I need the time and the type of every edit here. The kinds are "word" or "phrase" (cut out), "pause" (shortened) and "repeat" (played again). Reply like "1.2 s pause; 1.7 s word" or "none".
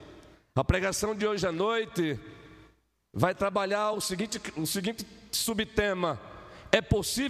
none